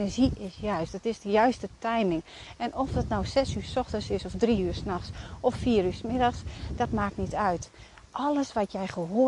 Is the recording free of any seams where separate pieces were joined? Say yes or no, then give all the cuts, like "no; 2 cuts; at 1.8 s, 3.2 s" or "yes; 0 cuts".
yes; 0 cuts